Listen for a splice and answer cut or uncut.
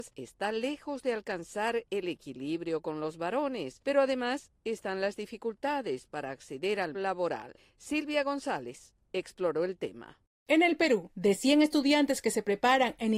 cut